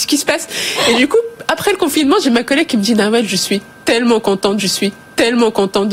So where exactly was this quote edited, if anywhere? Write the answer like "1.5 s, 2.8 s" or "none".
4.6 s